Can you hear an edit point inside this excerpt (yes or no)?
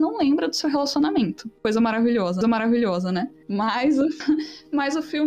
yes